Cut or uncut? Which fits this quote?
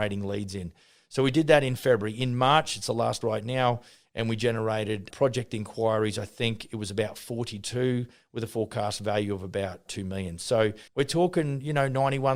cut